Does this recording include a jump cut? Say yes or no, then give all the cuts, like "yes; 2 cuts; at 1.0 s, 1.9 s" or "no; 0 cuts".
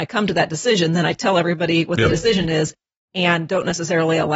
no; 0 cuts